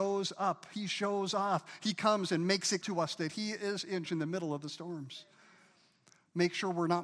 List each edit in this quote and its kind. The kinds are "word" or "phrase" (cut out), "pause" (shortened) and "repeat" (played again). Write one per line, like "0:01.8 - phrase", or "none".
0:02.8 - word
0:04.0 - word